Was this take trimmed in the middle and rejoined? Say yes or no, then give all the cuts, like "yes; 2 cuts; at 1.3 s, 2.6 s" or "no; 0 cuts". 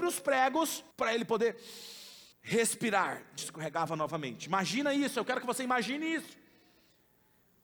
yes; 3 cuts; at 0.9 s, 2.3 s, 3.4 s